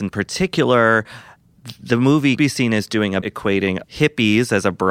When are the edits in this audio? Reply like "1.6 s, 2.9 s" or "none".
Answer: 2.4 s, 3.2 s, 3.8 s